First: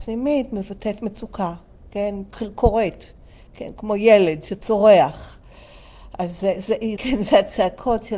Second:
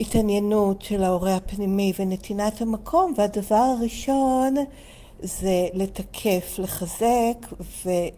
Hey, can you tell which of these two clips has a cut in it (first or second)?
first